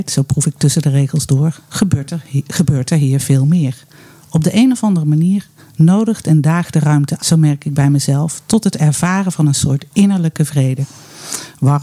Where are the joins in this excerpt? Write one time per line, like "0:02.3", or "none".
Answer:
0:07.2